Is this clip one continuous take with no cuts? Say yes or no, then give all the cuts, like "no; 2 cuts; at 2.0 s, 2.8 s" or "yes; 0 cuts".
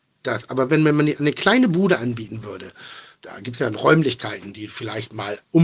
yes; 0 cuts